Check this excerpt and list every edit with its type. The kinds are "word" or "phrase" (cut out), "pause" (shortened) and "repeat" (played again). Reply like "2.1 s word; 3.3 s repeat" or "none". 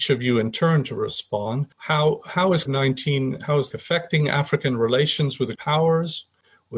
1.7 s pause; 2.7 s word; 3.7 s word; 5.6 s word